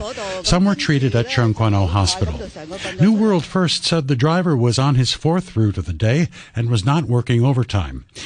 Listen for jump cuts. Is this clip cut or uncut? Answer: uncut